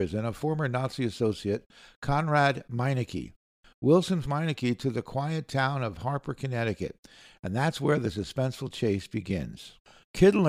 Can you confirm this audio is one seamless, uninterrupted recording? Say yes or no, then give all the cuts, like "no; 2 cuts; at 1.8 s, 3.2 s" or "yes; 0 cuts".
no; 1 cut; at 4.2 s